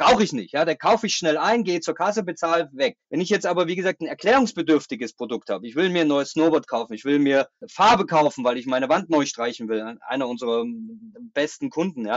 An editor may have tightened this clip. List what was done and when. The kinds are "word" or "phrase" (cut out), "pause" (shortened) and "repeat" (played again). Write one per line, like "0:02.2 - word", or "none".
0:03.0 - pause